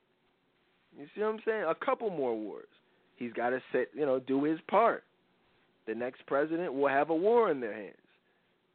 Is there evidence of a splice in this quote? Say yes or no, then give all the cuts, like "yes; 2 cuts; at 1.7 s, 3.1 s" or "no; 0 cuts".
no; 0 cuts